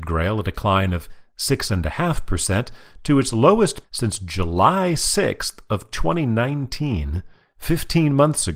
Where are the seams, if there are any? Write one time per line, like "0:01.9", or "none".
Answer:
0:03.8

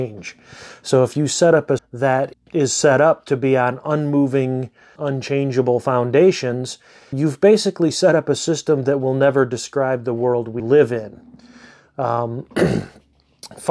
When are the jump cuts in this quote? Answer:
0:01.8
0:02.3
0:05.0
0:07.1
0:10.6

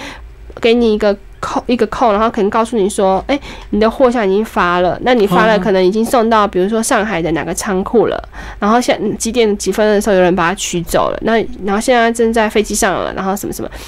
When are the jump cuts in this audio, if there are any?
none

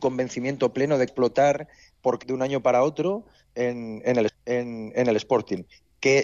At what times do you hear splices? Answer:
0:01.1
0:02.2
0:04.3

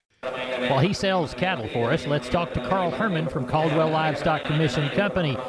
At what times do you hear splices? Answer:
none

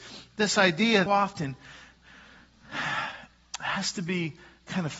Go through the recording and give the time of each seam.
0:01.1

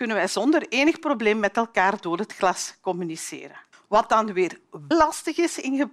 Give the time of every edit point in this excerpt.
0:03.7
0:04.9

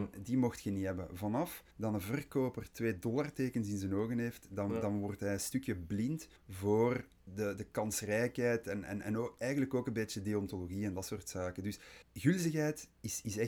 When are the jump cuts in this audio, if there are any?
0:01.7
0:06.4
0:12.0

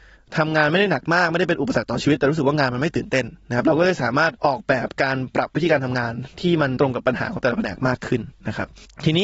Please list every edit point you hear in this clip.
0:04.4

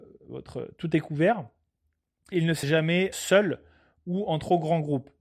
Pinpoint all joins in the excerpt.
0:02.3
0:02.6
0:03.1

